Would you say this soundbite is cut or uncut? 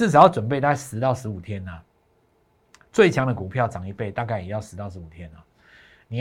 uncut